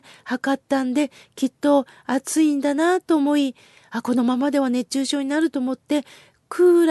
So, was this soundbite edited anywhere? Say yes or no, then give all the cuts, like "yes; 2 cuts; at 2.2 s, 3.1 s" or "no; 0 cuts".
no; 0 cuts